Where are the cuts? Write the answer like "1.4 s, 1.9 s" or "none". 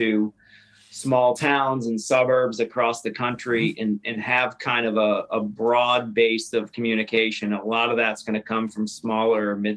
none